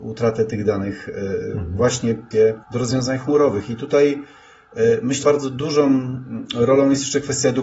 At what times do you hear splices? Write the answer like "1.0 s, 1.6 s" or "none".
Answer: 2.3 s, 2.6 s, 5.2 s